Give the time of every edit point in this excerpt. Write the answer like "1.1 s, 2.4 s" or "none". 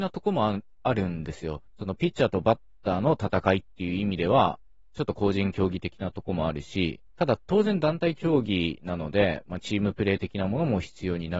1.7 s, 7.1 s